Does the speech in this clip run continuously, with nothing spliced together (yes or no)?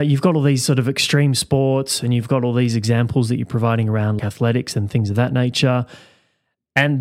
no